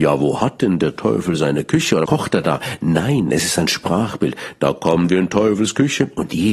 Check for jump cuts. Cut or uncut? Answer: cut